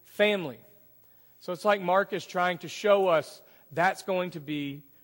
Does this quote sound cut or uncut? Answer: uncut